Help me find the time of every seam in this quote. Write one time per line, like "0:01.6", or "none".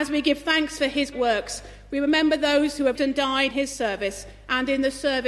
0:01.1
0:03.0
0:03.5